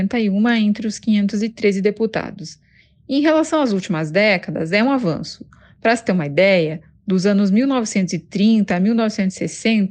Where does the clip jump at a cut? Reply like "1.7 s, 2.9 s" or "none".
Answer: none